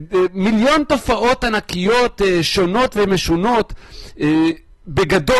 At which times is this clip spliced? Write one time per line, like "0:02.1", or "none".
none